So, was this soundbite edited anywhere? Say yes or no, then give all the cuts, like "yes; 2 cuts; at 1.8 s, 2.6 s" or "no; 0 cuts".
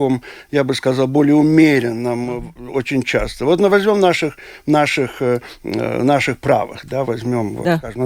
no; 0 cuts